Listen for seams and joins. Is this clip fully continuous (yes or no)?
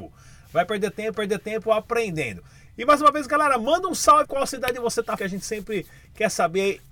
no